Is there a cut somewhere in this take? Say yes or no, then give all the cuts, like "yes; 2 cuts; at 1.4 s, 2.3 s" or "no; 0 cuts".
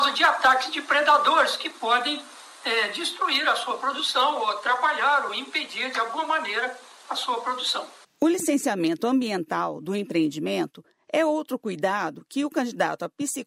no; 0 cuts